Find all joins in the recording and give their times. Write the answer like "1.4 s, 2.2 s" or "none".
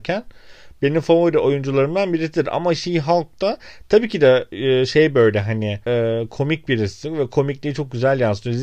5.8 s